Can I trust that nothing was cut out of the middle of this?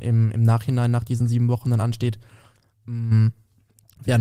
yes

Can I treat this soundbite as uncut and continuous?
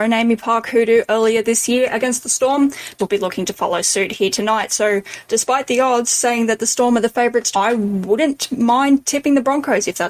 no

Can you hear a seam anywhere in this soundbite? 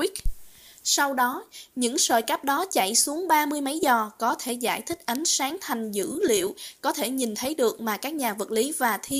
no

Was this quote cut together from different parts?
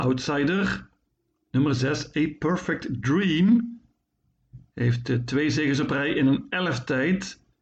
no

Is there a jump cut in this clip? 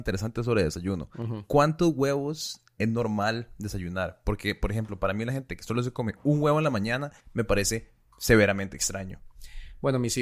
yes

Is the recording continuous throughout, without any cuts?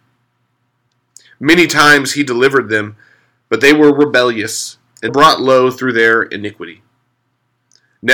no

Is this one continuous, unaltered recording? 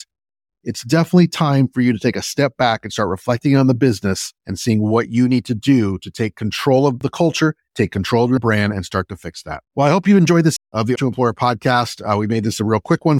no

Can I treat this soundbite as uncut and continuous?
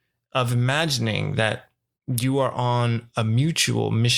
yes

